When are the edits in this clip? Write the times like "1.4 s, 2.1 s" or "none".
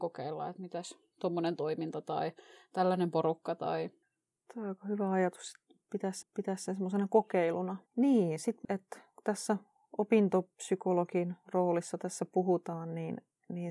4.0 s, 6.2 s, 7.9 s, 8.6 s, 11.4 s